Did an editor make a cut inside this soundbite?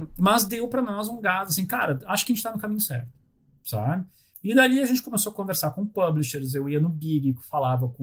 no; 0 cuts

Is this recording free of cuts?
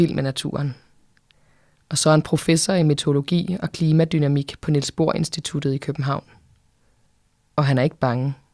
yes; 0 cuts

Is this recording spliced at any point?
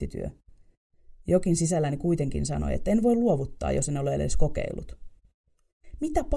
no; 0 cuts

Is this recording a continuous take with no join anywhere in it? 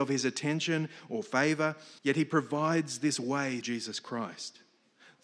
no; 2 cuts; at 2.0 s, 3.6 s

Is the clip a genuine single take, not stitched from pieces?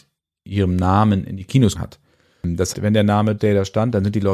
no; 3 cuts; at 1.7 s, 2.7 s, 3.4 s

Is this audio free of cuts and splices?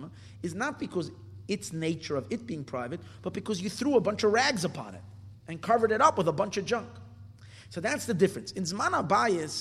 yes; 0 cuts

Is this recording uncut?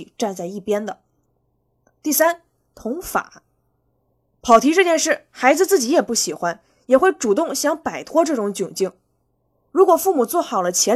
yes; 0 cuts

